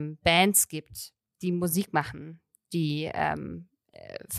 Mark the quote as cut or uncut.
uncut